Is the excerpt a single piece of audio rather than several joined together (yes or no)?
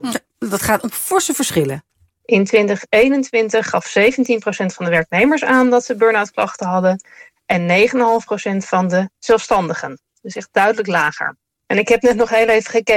yes